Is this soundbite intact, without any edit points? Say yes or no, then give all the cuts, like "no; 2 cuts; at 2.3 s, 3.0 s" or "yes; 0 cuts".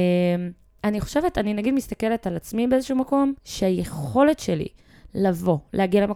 no; 1 cut; at 3.4 s